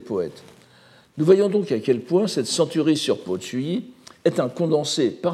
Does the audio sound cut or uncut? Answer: uncut